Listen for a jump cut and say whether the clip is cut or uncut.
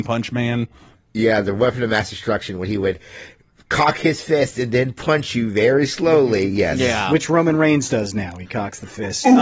uncut